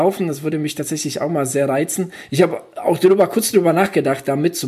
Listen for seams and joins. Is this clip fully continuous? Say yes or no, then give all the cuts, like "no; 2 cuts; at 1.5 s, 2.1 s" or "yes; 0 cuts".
yes; 0 cuts